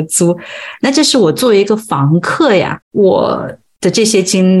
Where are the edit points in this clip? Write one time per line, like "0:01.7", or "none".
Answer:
0:02.8